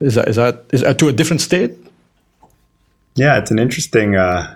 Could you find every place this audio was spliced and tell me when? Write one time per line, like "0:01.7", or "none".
none